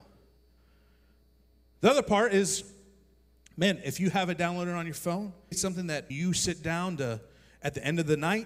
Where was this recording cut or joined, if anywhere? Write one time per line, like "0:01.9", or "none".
0:05.5
0:06.1

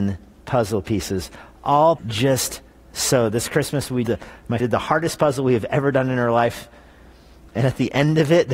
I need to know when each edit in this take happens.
0:02.0
0:04.0
0:04.6

